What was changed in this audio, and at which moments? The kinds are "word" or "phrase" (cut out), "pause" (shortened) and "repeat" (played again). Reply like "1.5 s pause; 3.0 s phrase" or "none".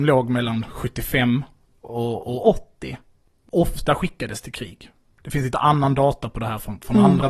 none